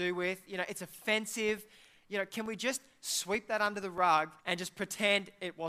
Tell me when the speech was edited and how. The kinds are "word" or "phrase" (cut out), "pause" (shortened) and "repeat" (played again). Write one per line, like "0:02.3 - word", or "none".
0:04.4 - pause